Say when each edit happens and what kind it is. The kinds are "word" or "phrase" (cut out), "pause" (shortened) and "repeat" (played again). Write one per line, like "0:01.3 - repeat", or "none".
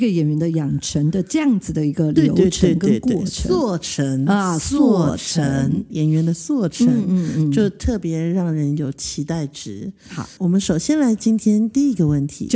0:05.9 - word
0:10.4 - word